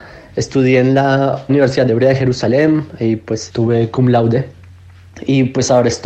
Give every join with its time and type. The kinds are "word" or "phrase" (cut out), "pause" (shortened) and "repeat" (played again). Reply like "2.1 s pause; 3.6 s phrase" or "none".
1.5 s phrase; 3.5 s word

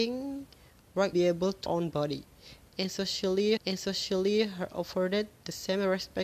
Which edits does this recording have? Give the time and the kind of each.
1.1 s word; 1.7 s phrase; 3.6 s repeat

